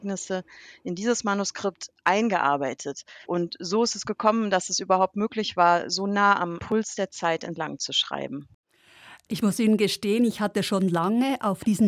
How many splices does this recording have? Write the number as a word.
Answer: one